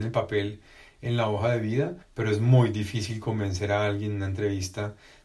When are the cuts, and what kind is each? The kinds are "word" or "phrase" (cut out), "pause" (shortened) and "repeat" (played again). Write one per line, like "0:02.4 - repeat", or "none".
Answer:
0:02.0 - pause